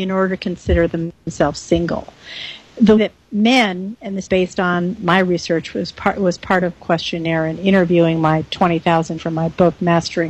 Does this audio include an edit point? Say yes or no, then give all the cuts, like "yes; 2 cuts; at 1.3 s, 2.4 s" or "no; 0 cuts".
yes; 4 cuts; at 3.0 s, 4.3 s, 6.8 s, 9.2 s